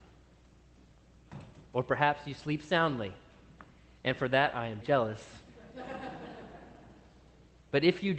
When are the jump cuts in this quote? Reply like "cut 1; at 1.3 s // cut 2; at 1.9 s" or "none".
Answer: cut 1; at 4.8 s